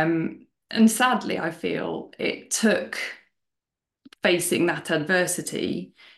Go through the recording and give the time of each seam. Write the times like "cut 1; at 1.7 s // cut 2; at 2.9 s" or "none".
none